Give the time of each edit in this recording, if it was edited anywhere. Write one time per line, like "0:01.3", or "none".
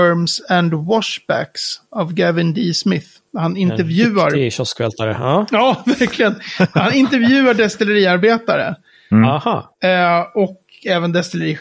none